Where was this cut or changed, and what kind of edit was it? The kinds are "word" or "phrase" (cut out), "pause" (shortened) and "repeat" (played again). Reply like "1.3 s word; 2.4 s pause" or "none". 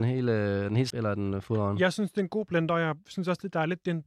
0.9 s word